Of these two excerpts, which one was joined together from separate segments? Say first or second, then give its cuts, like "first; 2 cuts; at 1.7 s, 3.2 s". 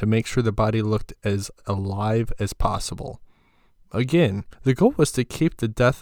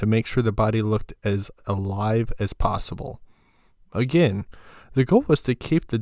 first; 1 cut; at 4.5 s